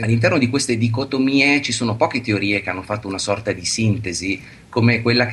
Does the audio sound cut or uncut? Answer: uncut